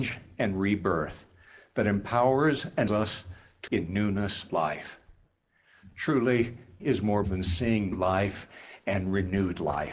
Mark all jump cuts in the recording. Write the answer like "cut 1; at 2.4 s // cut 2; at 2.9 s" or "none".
cut 1; at 2.9 s // cut 2; at 3.7 s // cut 3; at 4.5 s // cut 4; at 6.8 s // cut 5; at 7.2 s // cut 6; at 7.9 s